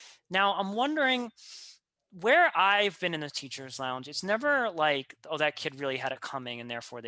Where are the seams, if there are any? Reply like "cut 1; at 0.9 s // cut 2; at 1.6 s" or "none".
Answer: none